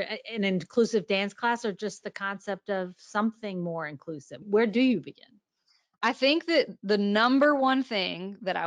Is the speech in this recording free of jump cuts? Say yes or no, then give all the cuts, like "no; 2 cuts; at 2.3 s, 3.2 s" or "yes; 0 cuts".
yes; 0 cuts